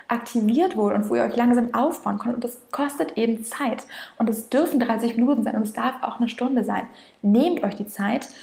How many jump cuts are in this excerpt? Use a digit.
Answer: 0